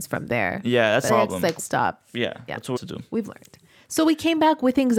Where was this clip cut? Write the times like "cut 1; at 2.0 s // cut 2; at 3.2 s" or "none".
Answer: cut 1; at 1.1 s // cut 2; at 1.6 s // cut 3; at 2.8 s